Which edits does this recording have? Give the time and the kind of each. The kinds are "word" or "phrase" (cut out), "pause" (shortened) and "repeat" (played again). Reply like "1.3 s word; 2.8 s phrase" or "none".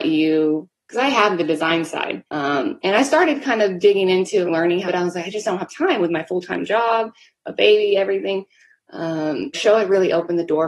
2.3 s pause; 4.5 s word; 4.9 s phrase; 9.5 s word